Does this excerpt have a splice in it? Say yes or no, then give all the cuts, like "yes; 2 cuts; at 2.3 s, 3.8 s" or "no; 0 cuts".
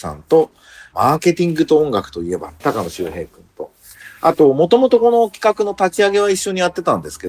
yes; 1 cut; at 2.6 s